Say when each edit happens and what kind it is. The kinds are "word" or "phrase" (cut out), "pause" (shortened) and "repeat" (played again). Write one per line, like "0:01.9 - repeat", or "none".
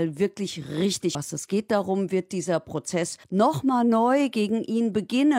0:01.1 - word
0:03.2 - pause